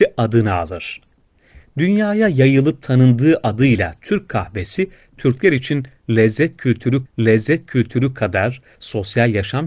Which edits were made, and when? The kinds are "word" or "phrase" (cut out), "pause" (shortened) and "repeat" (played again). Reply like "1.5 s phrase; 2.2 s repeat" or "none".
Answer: 7.1 s repeat

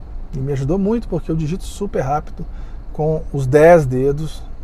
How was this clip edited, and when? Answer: none

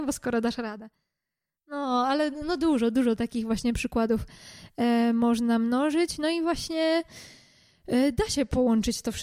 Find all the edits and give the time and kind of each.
none

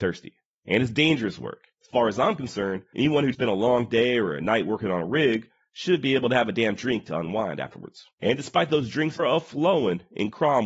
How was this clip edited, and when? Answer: 1.7 s pause; 3.3 s word; 8.1 s pause; 9.2 s phrase

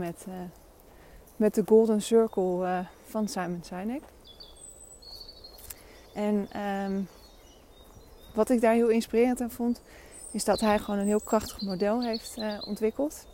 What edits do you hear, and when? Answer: 1.3 s pause; 6.1 s pause

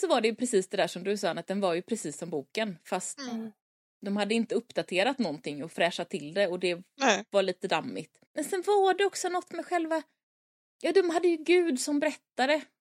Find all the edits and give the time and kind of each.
8.2 s pause

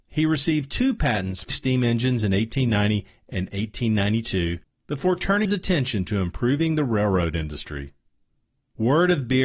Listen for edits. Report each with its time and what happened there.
1.5 s word; 5.5 s word

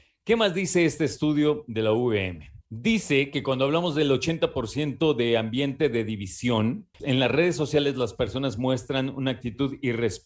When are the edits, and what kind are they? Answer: 2.6 s pause; 6.9 s pause

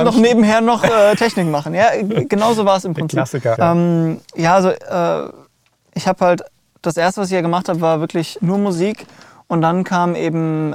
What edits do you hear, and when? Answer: 3.5 s word; 4.2 s pause; 8.4 s word

